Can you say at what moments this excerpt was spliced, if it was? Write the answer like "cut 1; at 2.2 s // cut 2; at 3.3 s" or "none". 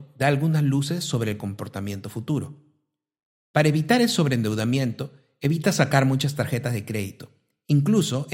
none